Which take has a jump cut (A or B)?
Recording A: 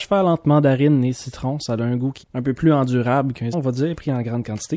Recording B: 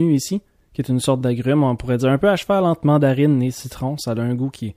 A